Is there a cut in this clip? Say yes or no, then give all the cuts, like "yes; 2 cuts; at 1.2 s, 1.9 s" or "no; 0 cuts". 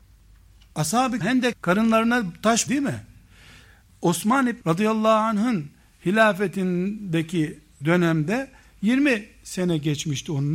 yes; 5 cuts; at 1.2 s, 1.5 s, 2.7 s, 4.6 s, 7.8 s